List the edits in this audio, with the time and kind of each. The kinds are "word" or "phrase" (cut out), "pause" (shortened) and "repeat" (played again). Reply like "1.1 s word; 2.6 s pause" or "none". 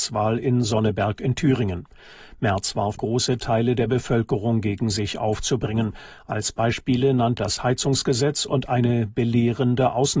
3.0 s phrase; 7.4 s word